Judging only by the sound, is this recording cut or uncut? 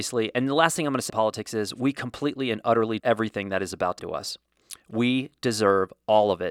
cut